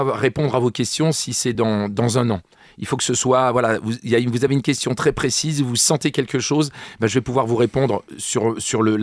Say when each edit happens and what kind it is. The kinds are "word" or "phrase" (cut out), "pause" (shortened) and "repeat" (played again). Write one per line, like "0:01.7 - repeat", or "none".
none